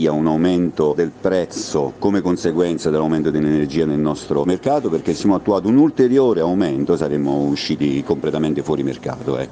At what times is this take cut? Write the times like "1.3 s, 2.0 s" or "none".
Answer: 5.2 s